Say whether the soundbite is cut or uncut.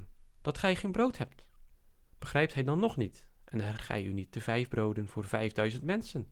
cut